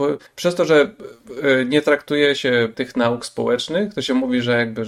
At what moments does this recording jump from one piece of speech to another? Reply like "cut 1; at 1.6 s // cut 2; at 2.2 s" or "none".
cut 1; at 2.7 s